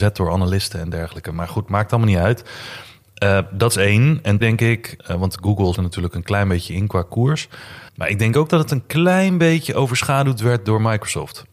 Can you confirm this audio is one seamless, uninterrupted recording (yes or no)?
no